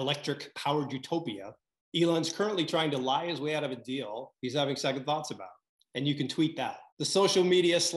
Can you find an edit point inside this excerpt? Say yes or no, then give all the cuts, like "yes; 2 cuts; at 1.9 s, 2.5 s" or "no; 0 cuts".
yes; 3 cuts; at 1.8 s, 5.7 s, 6.9 s